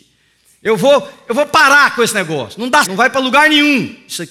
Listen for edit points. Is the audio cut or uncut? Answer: cut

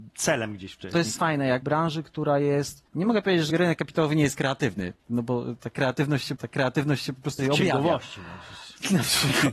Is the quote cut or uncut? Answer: cut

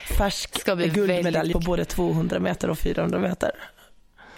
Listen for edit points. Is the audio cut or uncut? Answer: cut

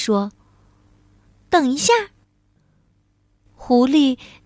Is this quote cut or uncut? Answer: uncut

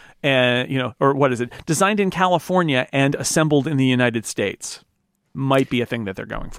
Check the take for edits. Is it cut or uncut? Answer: cut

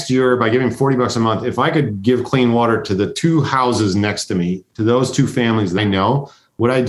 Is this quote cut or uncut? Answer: cut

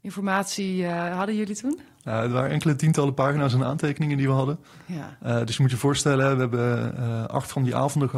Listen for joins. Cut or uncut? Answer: uncut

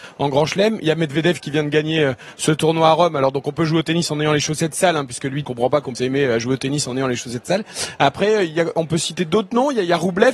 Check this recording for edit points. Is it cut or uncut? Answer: cut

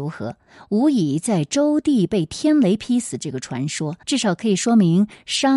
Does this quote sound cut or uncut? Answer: cut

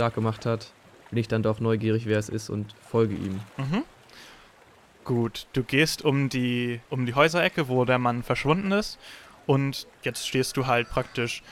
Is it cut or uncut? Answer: cut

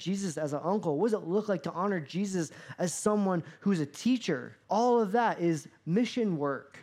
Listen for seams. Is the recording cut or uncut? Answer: cut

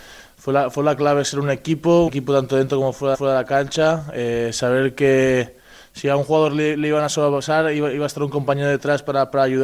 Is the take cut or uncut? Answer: cut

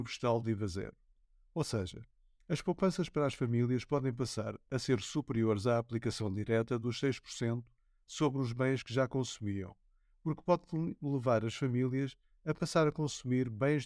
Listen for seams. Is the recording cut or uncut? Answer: uncut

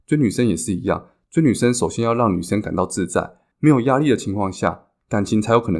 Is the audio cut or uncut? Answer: uncut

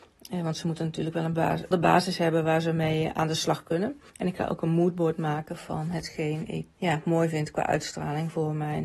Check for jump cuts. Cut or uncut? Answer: cut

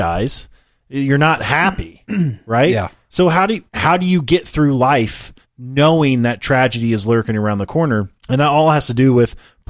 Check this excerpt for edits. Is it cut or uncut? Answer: cut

